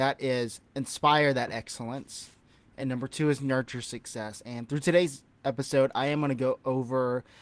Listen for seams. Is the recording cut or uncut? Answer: uncut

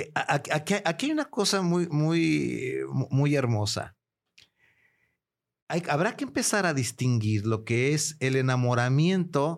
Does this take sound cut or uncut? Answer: uncut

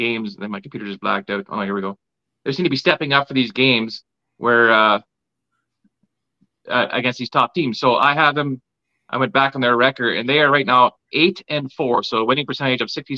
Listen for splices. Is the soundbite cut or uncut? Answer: uncut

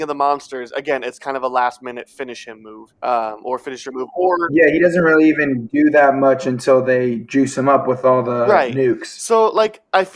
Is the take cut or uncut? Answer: cut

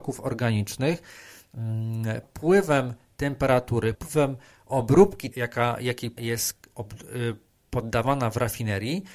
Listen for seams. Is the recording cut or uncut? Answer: cut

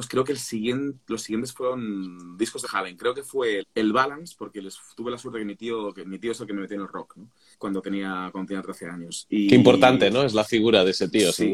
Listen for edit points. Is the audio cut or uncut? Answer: cut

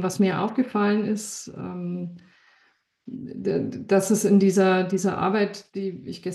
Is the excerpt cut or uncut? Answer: uncut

